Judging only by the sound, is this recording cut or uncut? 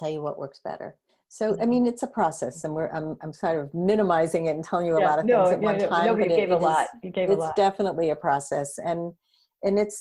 cut